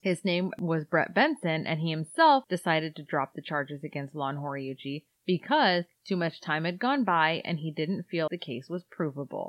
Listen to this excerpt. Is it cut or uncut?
cut